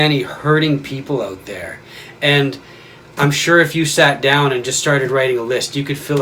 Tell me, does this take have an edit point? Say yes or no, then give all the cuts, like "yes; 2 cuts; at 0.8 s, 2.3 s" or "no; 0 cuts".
no; 0 cuts